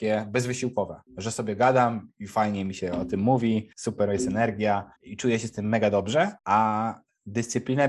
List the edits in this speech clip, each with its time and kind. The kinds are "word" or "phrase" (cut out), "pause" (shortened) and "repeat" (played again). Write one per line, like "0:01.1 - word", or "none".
0:01.1 - pause
0:03.7 - pause
0:05.0 - pause
0:06.4 - pause